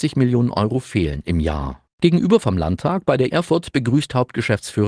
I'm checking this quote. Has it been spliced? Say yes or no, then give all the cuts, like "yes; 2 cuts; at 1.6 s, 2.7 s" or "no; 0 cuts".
yes; 2 cuts; at 1.9 s, 3.3 s